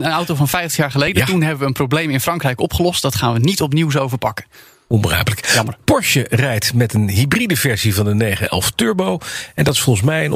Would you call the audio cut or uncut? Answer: uncut